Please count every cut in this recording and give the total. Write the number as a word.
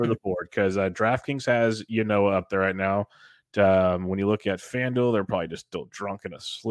zero